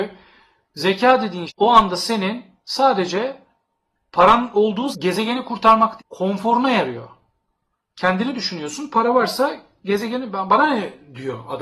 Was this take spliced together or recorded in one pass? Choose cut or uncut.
cut